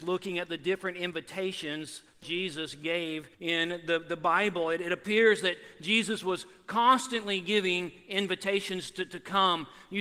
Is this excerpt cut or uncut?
cut